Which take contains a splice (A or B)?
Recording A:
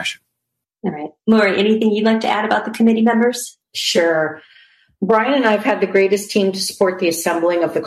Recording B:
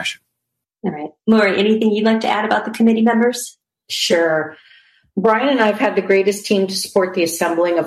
A